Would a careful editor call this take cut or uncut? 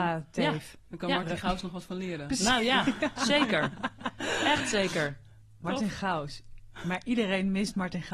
uncut